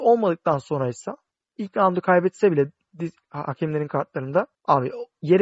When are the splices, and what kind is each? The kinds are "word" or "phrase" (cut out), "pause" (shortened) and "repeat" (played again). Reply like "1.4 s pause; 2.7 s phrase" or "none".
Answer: none